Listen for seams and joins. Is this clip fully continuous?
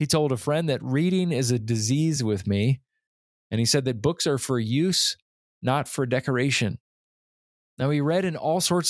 yes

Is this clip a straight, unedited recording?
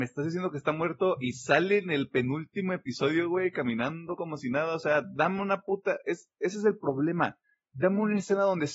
yes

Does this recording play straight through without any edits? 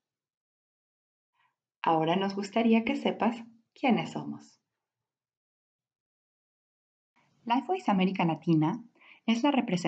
yes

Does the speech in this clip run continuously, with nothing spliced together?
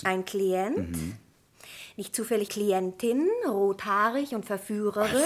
no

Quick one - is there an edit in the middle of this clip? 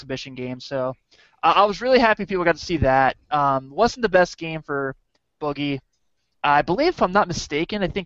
no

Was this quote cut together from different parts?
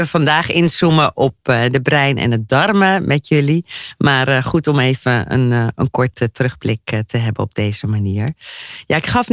no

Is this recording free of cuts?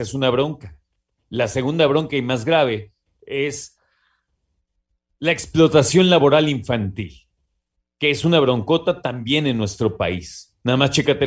yes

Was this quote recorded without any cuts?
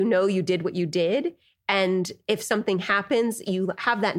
yes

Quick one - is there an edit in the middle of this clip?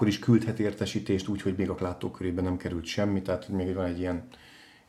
yes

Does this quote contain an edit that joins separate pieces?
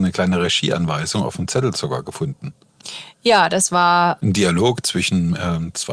no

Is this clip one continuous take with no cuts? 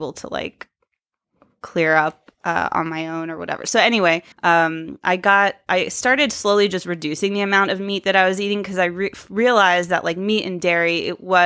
no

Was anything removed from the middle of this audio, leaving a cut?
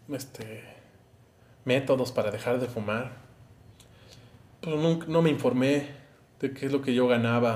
no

